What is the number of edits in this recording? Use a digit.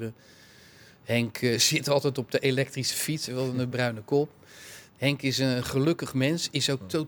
1